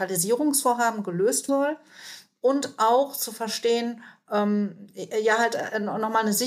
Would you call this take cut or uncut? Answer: cut